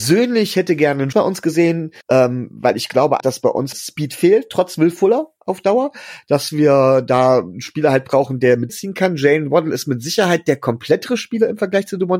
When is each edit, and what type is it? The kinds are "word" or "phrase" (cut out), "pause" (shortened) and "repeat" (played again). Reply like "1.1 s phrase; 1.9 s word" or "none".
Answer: 1.1 s phrase; 2.0 s pause; 3.2 s word; 3.7 s word; 5.4 s pause; 8.7 s phrase